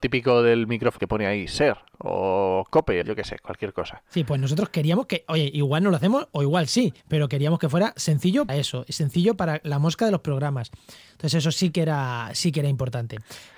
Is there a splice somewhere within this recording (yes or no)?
yes